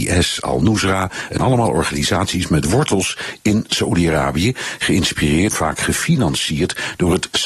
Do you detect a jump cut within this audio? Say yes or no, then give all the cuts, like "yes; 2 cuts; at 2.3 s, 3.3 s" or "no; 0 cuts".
yes; 2 cuts; at 1.4 s, 5.5 s